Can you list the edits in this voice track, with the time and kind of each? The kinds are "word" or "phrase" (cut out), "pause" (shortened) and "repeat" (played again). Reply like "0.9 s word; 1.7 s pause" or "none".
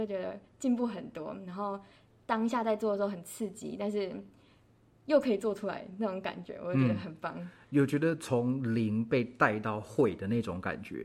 none